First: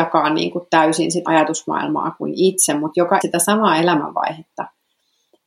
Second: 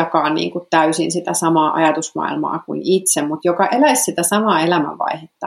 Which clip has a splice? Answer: first; 2 cuts; at 1.3 s, 3.2 s

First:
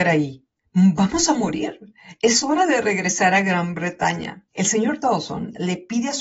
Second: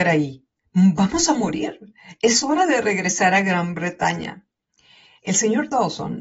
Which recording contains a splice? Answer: first; 1 cut; at 4.5 s

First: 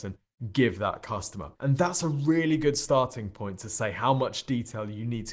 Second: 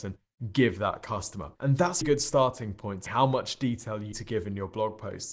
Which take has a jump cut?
second; 3 cuts; at 2.0 s, 3.1 s, 4.1 s

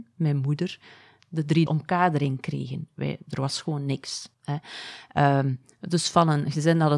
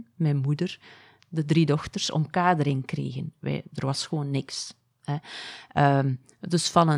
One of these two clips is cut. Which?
first; 2 cuts; at 1.7 s, 4.3 s

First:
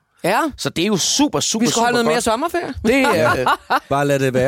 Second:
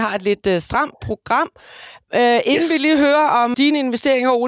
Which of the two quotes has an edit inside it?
second; 1 cut; at 3.5 s

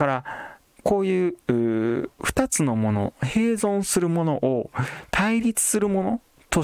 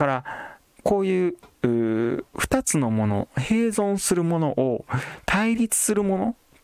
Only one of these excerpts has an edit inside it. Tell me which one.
first; 1 cut; at 1.4 s

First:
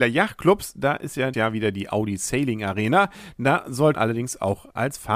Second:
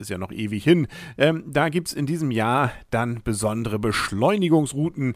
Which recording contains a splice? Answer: first; 2 cuts; at 1.3 s, 3.9 s

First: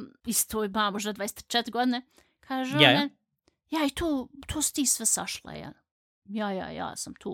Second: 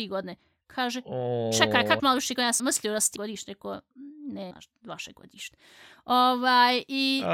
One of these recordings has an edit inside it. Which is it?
second; 4 cuts; at 2.0 s, 2.6 s, 3.2 s, 4.5 s

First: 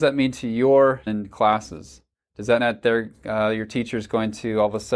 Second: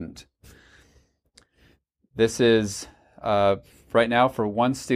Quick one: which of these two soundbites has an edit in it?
first; 2 cuts; at 1.1 s, 2.6 s

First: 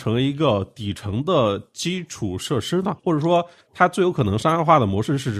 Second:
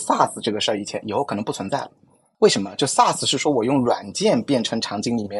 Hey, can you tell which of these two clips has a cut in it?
first; 1 cut; at 3.0 s

